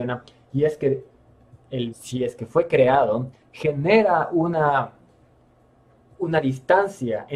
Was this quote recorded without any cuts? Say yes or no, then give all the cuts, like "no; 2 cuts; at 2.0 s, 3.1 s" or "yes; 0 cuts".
no; 2 cuts; at 1.9 s, 3.4 s